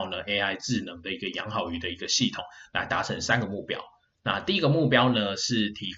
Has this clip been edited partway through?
no; 0 cuts

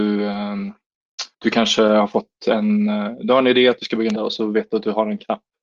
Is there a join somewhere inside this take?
yes; 2 cuts; at 1.3 s, 4.2 s

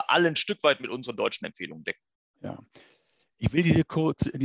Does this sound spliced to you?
no; 0 cuts

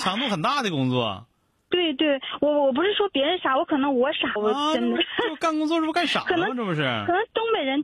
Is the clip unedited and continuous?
no; 1 cut; at 4.4 s

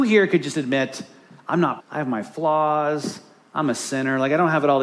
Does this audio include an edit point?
yes; 1 cut; at 1.8 s

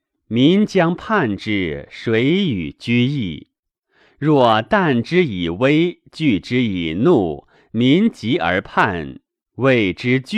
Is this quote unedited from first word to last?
yes; 0 cuts

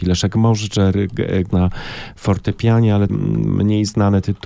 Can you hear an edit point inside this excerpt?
yes; 2 cuts; at 1.5 s, 3.1 s

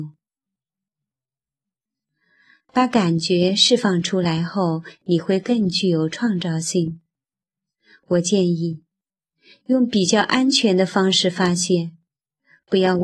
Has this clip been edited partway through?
no; 0 cuts

